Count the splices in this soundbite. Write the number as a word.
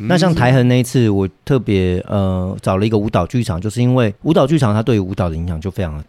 one